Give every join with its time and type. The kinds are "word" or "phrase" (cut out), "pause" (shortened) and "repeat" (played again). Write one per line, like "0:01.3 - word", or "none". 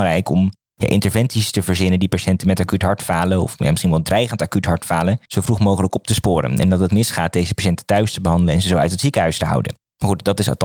0:05.3 - pause
0:06.9 - phrase